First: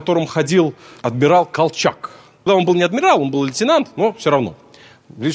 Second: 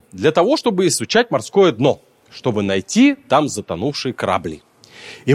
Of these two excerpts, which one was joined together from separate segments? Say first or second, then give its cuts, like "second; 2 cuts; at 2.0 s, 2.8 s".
first; 1 cut; at 2.5 s